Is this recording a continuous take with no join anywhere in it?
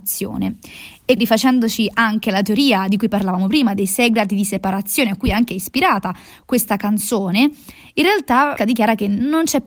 no; 2 cuts; at 1.2 s, 8.6 s

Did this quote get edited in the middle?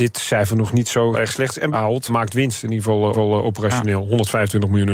yes; 4 cuts; at 1.1 s, 1.7 s, 2.1 s, 3.1 s

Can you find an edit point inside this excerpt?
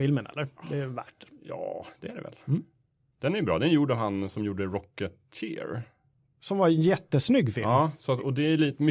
no; 0 cuts

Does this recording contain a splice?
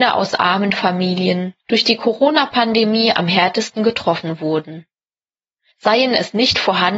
no; 0 cuts

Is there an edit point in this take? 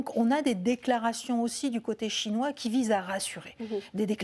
no; 0 cuts

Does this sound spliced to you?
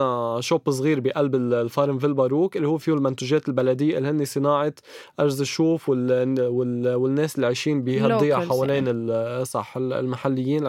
no; 0 cuts

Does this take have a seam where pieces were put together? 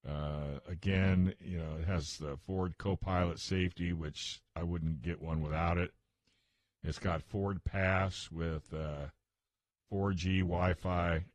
no; 0 cuts

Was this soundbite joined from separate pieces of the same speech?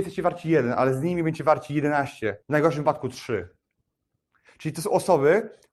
yes; 1 cut; at 2.4 s

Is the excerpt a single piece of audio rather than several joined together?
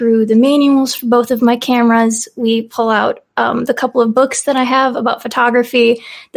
yes; 0 cuts

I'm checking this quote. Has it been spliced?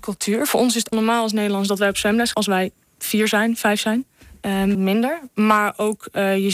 yes; 3 cuts; at 0.9 s, 2.3 s, 4.7 s

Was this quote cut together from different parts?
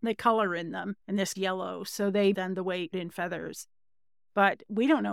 yes; 4 cuts; at 1.0 s, 1.3 s, 2.3 s, 2.9 s

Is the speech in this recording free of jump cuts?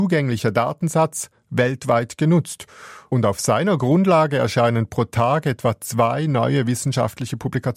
yes; 0 cuts

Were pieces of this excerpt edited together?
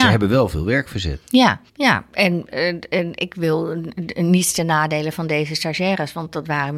yes; 1 cut; at 1.7 s

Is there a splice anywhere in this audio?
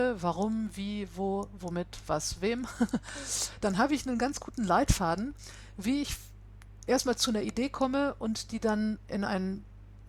no; 0 cuts

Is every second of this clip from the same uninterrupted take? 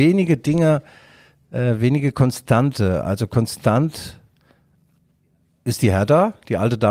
yes; 0 cuts

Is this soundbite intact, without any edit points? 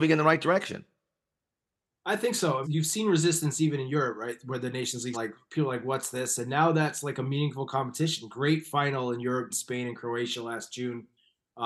no; 3 cuts; at 2.6 s, 5.1 s, 9.5 s

